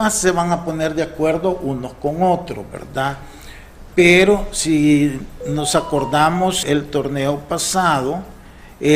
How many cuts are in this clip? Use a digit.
1